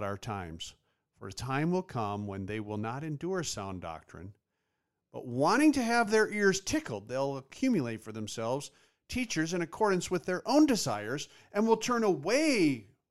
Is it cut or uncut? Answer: uncut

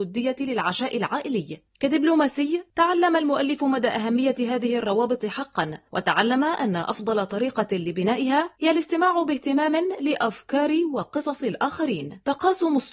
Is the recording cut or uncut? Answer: cut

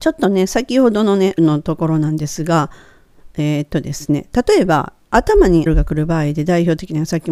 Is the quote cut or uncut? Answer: cut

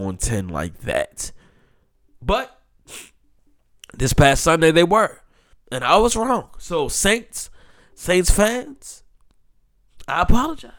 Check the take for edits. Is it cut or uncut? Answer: uncut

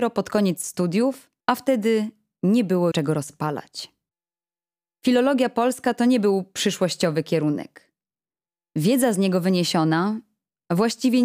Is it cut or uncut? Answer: cut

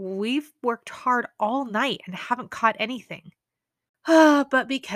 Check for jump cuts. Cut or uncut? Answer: uncut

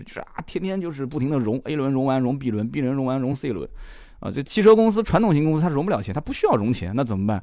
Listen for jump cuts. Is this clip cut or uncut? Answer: uncut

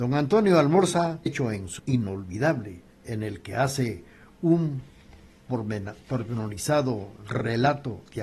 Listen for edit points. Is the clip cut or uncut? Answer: cut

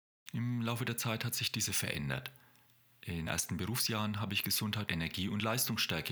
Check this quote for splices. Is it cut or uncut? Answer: cut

